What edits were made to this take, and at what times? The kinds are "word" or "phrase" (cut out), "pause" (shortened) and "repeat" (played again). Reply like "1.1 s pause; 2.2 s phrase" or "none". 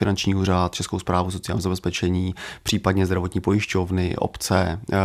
none